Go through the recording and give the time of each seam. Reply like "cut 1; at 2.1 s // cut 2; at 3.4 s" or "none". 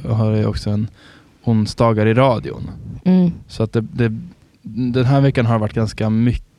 none

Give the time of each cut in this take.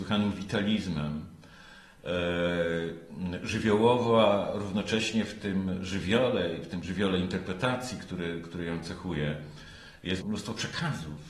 cut 1; at 10.2 s

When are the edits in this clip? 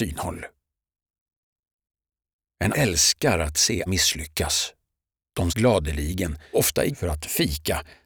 cut 1; at 2.7 s // cut 2; at 3.9 s // cut 3; at 5.5 s // cut 4; at 6.5 s // cut 5; at 6.9 s

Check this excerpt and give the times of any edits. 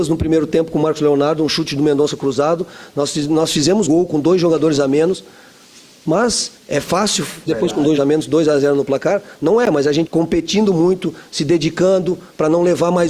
cut 1; at 3.9 s // cut 2; at 6.6 s // cut 3; at 7.5 s // cut 4; at 8.0 s // cut 5; at 10.1 s

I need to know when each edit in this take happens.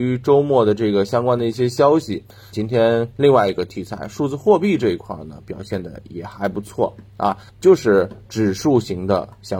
cut 1; at 2.5 s // cut 2; at 7.5 s

